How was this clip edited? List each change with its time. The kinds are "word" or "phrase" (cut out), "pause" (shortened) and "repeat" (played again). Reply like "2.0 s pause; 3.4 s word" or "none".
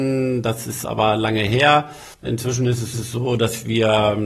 2.1 s pause; 2.9 s repeat